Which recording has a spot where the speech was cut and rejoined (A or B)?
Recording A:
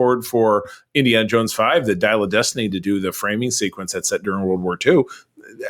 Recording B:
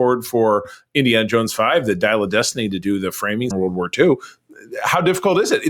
B